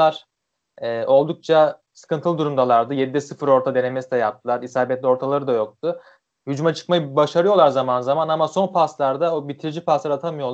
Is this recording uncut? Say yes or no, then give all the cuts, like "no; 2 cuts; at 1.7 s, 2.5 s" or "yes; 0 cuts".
yes; 0 cuts